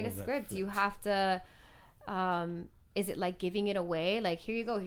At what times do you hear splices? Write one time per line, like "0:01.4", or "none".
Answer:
none